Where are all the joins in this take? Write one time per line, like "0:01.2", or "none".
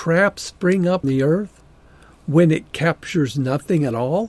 0:01.0